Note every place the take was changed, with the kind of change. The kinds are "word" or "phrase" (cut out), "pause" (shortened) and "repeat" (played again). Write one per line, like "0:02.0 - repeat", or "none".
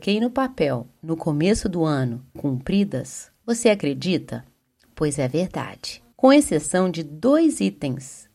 0:02.4 - word
0:06.1 - pause